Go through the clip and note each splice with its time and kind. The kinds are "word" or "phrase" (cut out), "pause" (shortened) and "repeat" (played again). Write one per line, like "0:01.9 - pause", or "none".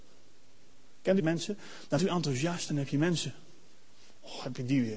0:01.2 - phrase
0:02.0 - word